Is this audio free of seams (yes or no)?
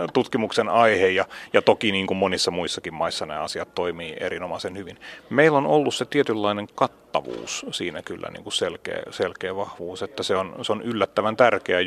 yes